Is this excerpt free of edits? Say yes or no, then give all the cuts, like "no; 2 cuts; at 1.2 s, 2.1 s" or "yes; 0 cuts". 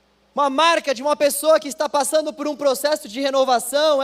yes; 0 cuts